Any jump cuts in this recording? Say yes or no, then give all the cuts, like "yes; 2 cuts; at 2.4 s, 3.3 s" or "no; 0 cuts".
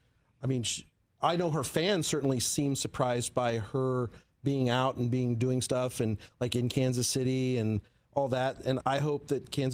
yes; 1 cut; at 8.8 s